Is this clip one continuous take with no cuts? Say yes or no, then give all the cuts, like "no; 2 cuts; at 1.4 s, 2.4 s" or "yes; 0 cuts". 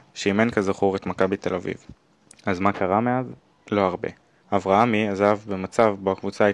yes; 0 cuts